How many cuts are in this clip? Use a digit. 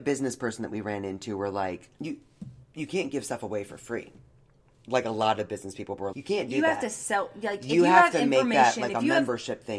2